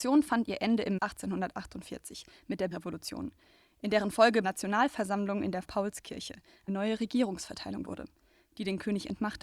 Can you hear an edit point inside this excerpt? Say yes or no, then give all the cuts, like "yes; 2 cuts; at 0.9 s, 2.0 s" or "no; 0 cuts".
yes; 6 cuts; at 1.0 s, 2.7 s, 4.4 s, 5.6 s, 6.7 s, 7.8 s